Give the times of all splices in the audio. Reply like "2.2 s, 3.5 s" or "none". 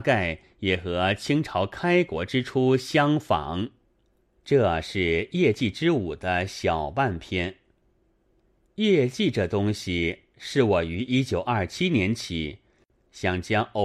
4.0 s